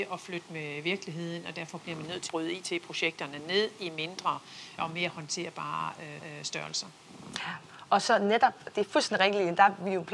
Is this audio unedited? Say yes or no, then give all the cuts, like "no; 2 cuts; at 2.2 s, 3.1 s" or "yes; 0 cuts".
no; 3 cuts; at 2.3 s, 4.8 s, 6.2 s